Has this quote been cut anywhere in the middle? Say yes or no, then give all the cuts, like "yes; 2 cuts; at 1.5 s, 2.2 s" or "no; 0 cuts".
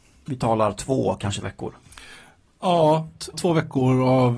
yes; 2 cuts; at 1.4 s, 3.3 s